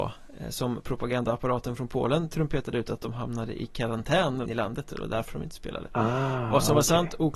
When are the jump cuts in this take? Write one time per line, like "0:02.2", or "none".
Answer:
0:04.4